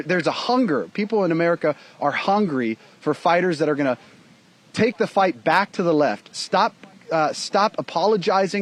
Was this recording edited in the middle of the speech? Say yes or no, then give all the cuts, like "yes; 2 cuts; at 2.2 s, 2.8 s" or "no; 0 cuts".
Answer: no; 0 cuts